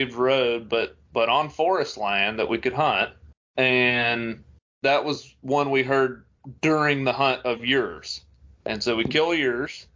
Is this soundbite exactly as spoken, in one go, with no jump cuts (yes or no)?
yes